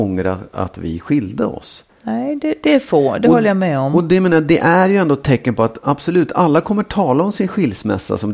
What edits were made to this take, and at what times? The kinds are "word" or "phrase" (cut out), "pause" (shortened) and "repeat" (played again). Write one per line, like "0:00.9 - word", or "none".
0:01.9 - pause